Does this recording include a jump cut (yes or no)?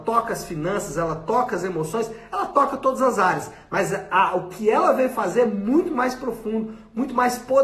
no